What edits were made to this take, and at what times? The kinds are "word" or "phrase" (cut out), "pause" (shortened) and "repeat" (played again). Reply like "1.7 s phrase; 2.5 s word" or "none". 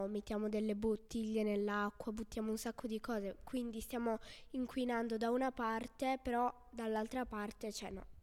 none